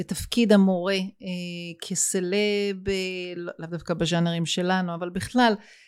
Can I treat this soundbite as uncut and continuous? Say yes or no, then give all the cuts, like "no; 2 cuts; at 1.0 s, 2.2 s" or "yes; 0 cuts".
yes; 0 cuts